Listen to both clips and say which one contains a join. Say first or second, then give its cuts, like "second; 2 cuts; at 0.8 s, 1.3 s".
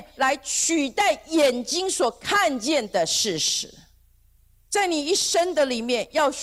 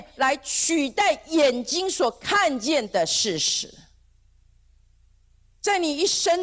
first; 1 cut; at 4.4 s